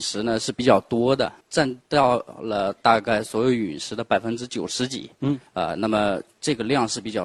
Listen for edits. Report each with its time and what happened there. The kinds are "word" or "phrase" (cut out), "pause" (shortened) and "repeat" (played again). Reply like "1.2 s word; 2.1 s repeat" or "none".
1.4 s pause; 5.5 s pause

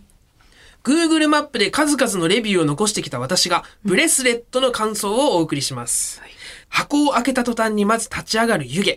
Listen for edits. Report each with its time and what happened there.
6.6 s pause

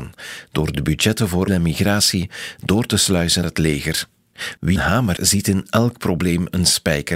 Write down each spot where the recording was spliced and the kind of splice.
1.5 s phrase; 3.4 s word; 4.8 s word; 5.2 s word

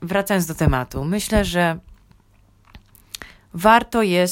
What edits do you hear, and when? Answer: none

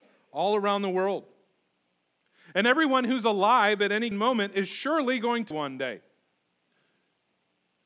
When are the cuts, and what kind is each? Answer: 4.1 s word; 5.5 s word

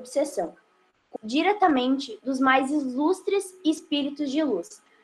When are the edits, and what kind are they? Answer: 1.2 s word

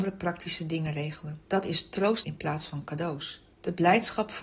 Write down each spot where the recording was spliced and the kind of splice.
1.4 s pause; 2.2 s word; 3.5 s pause

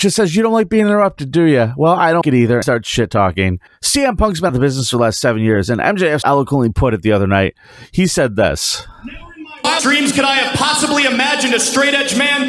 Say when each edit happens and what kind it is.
2.2 s word; 2.6 s word; 4.5 s word; 6.2 s word; 9.8 s word

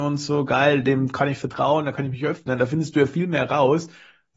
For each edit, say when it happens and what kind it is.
none

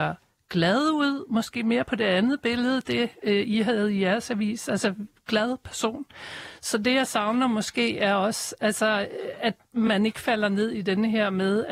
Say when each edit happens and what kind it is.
none

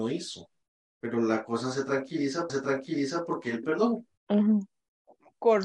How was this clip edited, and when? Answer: 2.5 s repeat; 3.6 s word; 4.2 s pause

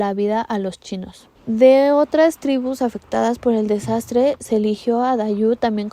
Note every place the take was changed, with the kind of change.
1.3 s pause

